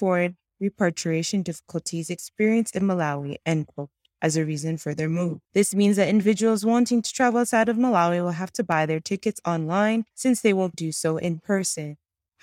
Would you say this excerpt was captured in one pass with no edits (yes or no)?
no